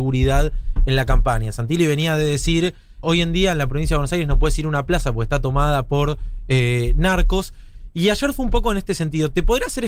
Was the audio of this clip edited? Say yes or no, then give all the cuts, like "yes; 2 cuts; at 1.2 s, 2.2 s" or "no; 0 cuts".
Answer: yes; 1 cut; at 3.0 s